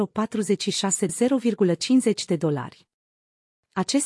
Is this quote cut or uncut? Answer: cut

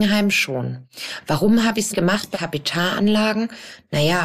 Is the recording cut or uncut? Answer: cut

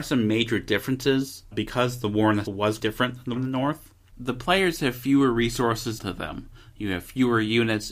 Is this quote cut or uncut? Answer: cut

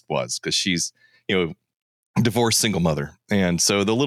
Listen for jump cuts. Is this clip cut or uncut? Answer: uncut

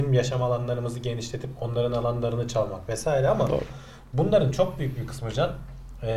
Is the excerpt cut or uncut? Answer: uncut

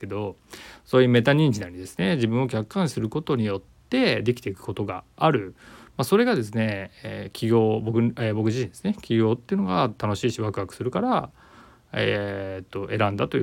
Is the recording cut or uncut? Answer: uncut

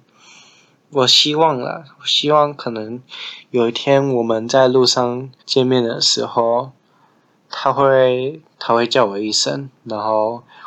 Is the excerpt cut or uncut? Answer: cut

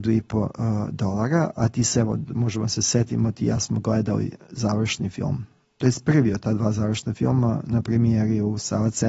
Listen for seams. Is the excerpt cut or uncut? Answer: uncut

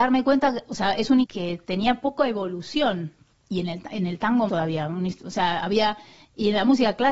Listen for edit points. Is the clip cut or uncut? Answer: cut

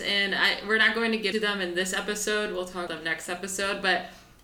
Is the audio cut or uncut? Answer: cut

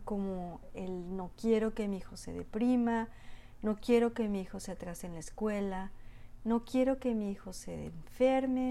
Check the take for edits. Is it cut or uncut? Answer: uncut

